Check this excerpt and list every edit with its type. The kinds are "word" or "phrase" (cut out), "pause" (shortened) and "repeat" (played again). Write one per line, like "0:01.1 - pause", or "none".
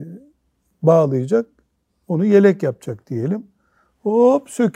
none